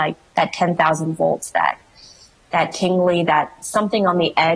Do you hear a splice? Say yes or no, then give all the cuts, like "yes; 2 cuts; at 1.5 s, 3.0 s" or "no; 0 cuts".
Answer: no; 0 cuts